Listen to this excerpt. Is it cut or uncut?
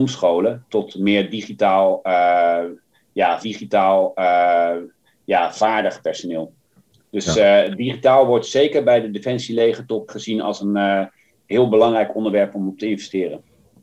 cut